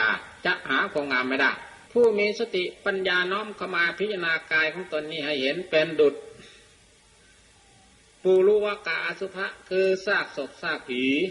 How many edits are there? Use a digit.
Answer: 1